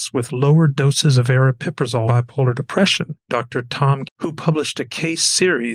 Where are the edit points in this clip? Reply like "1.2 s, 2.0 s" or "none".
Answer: 2.1 s, 3.3 s, 4.0 s